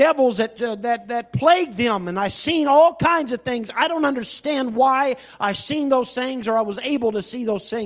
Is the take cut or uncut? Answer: uncut